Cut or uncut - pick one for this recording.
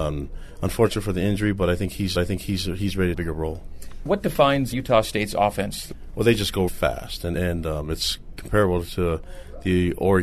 cut